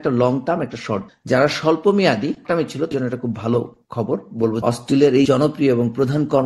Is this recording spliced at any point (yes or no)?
yes